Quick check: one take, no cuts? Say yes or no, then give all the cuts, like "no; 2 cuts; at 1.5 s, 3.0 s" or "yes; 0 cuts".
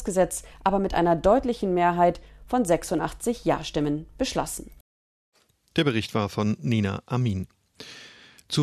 yes; 0 cuts